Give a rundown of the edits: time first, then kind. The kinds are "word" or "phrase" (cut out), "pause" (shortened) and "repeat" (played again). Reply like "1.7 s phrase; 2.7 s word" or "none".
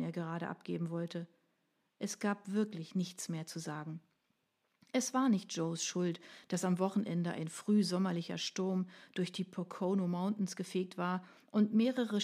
none